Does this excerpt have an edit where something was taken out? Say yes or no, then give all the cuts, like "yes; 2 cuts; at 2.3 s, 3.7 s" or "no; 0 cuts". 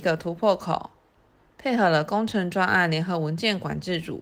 no; 0 cuts